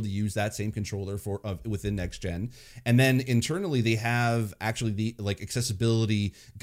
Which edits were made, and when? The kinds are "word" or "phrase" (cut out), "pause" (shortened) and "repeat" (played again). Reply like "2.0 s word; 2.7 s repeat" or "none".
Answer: none